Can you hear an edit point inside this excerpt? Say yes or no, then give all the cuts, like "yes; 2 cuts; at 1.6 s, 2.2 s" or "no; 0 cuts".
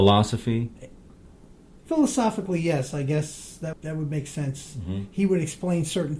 yes; 1 cut; at 3.7 s